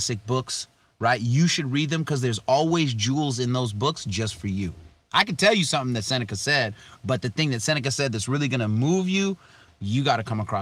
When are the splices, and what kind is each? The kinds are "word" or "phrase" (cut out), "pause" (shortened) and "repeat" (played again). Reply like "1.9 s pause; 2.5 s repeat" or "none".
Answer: none